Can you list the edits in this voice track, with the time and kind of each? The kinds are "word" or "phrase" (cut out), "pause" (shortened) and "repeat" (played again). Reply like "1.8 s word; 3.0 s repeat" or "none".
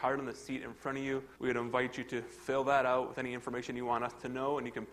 1.4 s pause